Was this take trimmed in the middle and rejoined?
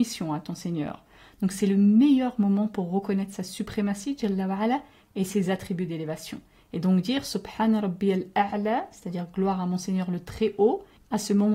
no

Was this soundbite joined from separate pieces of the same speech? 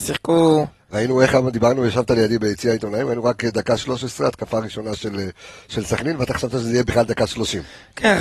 no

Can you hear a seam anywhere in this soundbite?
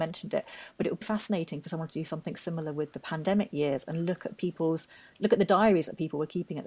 yes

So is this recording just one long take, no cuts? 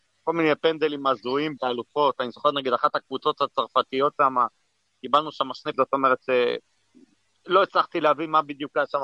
no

